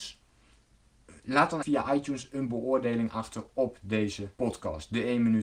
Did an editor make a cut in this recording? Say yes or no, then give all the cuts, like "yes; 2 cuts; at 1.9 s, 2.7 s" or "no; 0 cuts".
yes; 2 cuts; at 1.6 s, 4.3 s